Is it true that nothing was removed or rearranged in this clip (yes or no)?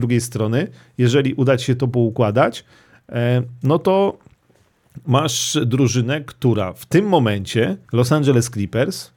no